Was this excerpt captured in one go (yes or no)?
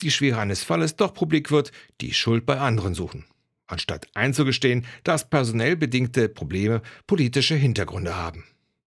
yes